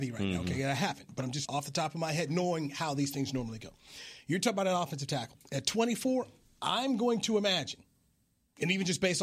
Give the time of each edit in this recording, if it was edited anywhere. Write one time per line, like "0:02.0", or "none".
0:01.5